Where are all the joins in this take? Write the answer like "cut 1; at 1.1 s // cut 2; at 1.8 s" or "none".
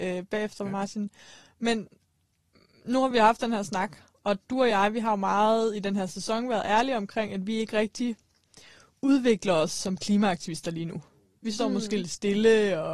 none